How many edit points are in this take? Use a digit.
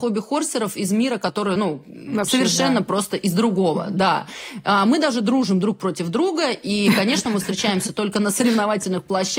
0